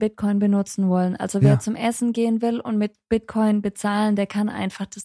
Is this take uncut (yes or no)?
yes